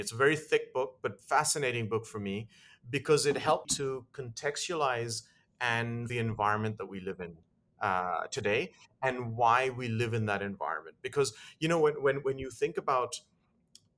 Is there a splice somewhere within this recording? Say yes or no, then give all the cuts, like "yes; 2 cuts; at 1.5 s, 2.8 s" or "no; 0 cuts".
yes; 2 cuts; at 3.6 s, 6.1 s